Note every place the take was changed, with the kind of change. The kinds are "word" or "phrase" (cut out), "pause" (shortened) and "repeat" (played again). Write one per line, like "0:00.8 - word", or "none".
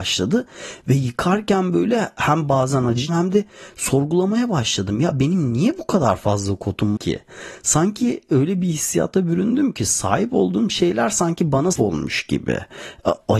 0:03.1 - word
0:07.0 - word
0:11.7 - word

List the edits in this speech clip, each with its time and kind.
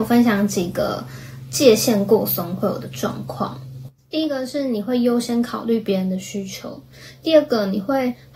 0:04.0 - pause

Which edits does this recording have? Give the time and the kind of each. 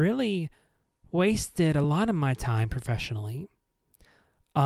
none

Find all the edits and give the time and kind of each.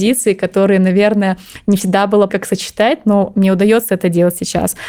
0:02.3 - word

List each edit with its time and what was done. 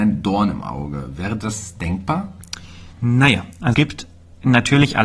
0:02.9 - pause
0:03.7 - word

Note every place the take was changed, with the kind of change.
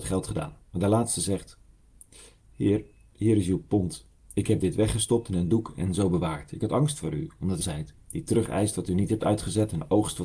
0:07.6 - phrase

